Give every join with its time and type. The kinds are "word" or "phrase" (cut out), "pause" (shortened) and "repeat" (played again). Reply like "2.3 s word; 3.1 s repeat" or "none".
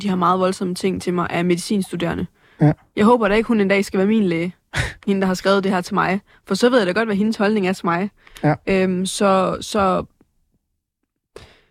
none